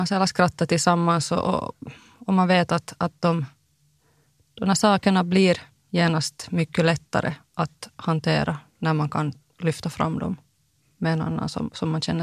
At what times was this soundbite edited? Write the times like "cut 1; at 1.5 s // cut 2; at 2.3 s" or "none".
none